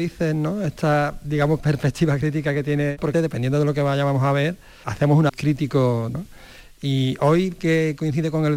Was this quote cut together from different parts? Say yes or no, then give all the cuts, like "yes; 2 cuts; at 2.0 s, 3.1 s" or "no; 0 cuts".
yes; 4 cuts; at 3.1 s, 4.8 s, 5.3 s, 6.1 s